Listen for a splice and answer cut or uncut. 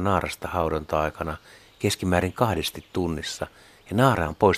uncut